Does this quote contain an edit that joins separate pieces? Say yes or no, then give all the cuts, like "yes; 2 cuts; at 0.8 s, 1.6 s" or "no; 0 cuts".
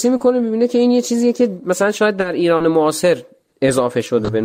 no; 0 cuts